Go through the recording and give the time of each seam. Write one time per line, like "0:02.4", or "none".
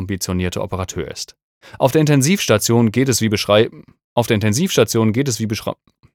none